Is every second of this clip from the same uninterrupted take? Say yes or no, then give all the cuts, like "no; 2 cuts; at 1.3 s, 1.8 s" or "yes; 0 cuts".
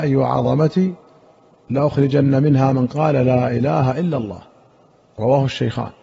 yes; 0 cuts